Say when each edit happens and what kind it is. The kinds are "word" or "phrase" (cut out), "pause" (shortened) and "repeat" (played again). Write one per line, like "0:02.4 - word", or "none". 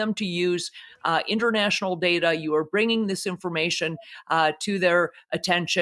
none